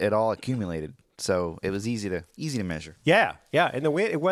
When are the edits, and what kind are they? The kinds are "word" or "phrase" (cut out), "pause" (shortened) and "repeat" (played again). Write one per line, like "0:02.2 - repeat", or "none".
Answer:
0:03.0 - pause